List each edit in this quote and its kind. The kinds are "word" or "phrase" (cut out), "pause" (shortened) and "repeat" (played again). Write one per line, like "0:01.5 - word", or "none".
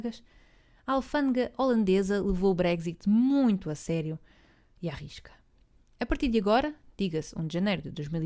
none